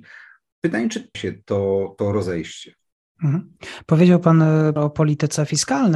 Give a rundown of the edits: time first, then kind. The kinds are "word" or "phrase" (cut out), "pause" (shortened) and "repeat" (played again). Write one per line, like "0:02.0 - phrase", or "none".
0:01.1 - word
0:04.8 - word